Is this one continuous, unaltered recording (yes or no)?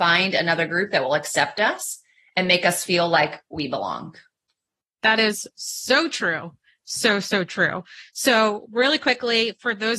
yes